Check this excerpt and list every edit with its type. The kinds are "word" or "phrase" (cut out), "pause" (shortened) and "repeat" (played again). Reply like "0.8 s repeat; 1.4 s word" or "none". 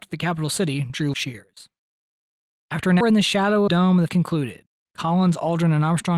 1.1 s word; 3.0 s word; 3.7 s phrase; 4.1 s word